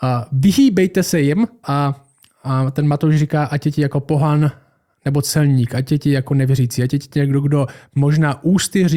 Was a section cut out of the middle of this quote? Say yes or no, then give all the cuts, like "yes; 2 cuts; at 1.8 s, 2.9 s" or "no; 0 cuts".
yes; 1 cut; at 1.6 s